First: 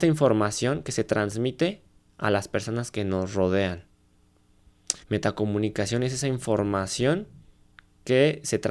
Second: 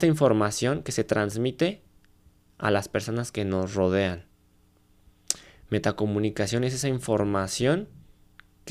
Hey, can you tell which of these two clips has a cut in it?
first; 2 cuts; at 2.0 s, 5.0 s

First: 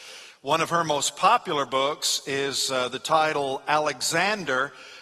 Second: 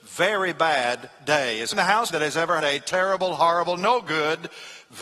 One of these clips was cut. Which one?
second; 3 cuts; at 1.7 s, 2.1 s, 2.6 s

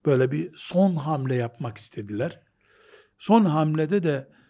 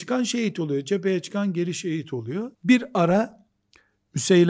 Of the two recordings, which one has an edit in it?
second; 1 cut; at 2.5 s

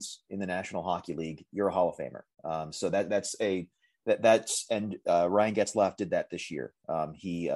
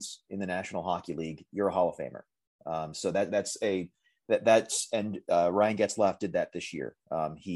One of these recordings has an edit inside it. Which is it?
first; 1 cut; at 2.3 s

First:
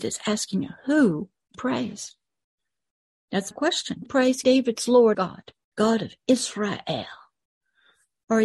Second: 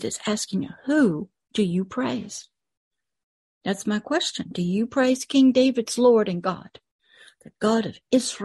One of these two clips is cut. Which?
first; 6 cuts; at 1.5 s, 3.5 s, 4.1 s, 4.4 s, 5.1 s, 5.7 s

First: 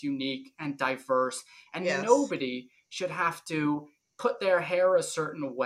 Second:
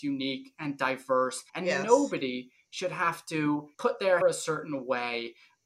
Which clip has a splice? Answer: second; 3 cuts; at 1.5 s, 3.7 s, 4.2 s

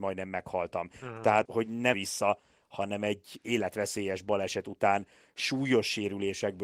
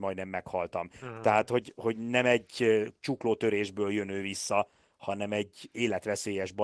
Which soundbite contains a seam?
first; 2 cuts; at 1.5 s, 1.9 s

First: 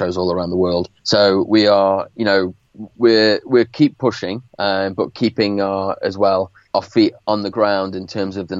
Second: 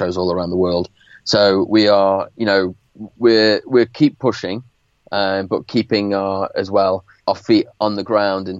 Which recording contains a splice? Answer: first; 2 cuts; at 1.0 s, 4.5 s

